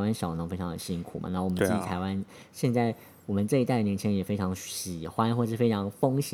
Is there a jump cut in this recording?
no; 0 cuts

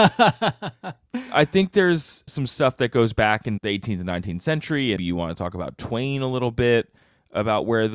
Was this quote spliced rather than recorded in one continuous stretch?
yes; 3 cuts; at 2.3 s, 3.6 s, 5.0 s

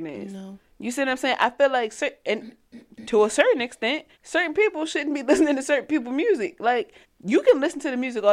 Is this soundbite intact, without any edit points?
no; 2 cuts; at 4.1 s, 7.0 s

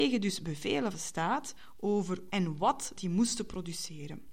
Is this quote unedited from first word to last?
no; 3 cuts; at 0.9 s, 2.3 s, 2.9 s

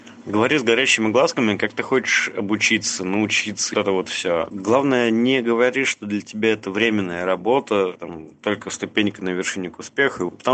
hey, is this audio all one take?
no; 1 cut; at 3.7 s

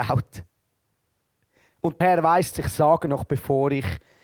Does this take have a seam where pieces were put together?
yes; 3 cuts; at 2.0 s, 2.5 s, 3.1 s

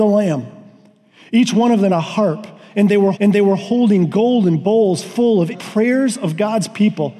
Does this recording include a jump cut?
yes; 3 cuts; at 1.9 s, 3.1 s, 5.5 s

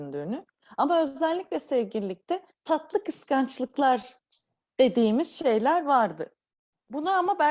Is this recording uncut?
yes; 0 cuts

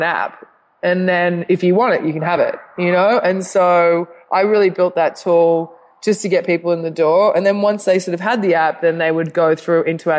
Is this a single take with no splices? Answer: yes; 0 cuts

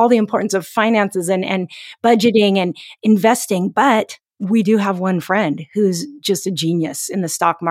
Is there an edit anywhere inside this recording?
no; 0 cuts

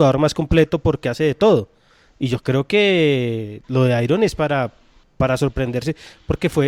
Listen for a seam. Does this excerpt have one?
no; 0 cuts

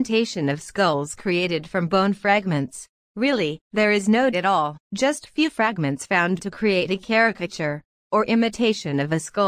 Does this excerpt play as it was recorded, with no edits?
no; 3 cuts; at 3.6 s, 4.3 s, 4.8 s

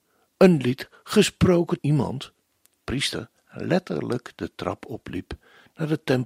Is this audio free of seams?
no; 3 cuts; at 1.8 s, 2.8 s, 3.4 s

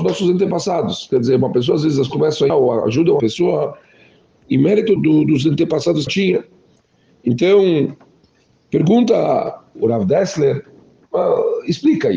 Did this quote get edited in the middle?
yes; 6 cuts; at 2.1 s, 2.5 s, 3.2 s, 5.0 s, 6.1 s, 9.8 s

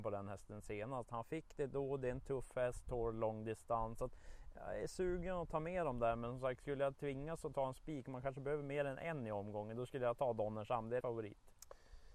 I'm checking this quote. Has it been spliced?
yes; 1 cut; at 11.0 s

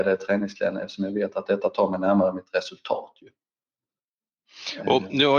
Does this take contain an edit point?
no; 0 cuts

